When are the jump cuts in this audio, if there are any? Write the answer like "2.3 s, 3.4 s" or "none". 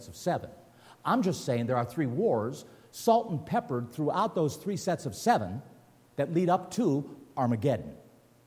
none